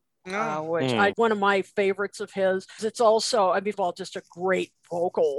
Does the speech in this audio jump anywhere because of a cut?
yes; 3 cuts; at 1.1 s, 2.8 s, 3.7 s

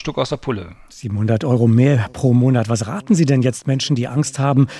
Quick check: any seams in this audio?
no; 0 cuts

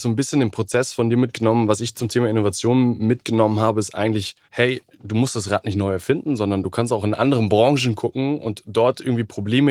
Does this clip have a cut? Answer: yes; 1 cut; at 4.4 s

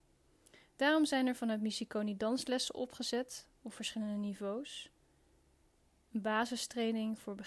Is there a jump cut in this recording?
no; 0 cuts

